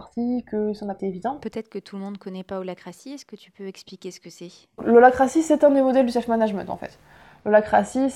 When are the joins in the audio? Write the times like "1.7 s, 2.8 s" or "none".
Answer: 1.0 s, 4.8 s